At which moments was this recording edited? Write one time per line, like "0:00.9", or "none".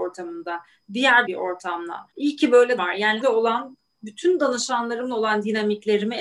0:01.3
0:02.1
0:02.8
0:03.2